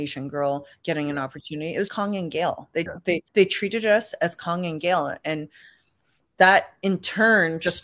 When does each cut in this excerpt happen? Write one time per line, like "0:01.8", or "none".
0:01.9
0:02.9
0:03.3